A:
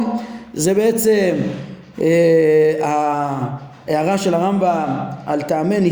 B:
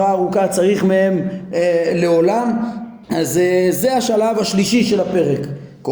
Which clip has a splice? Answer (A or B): B